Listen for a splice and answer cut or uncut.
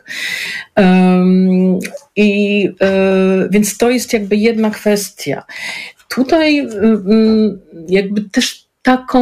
uncut